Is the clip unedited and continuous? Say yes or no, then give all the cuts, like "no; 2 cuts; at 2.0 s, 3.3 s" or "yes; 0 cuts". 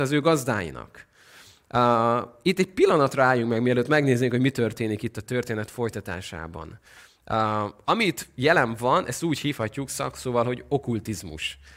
yes; 0 cuts